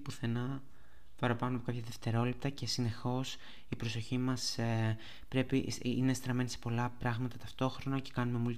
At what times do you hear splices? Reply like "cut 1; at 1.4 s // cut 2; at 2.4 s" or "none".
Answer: none